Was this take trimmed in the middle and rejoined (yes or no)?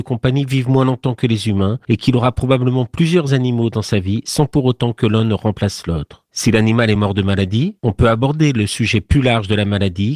no